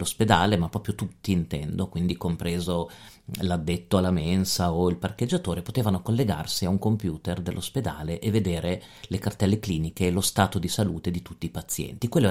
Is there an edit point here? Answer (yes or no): no